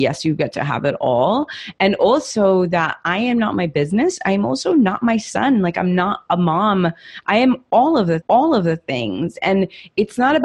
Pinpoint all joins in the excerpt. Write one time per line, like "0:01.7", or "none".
0:08.2